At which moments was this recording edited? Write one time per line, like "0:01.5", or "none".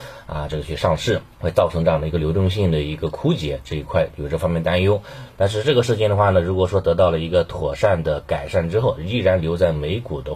0:01.3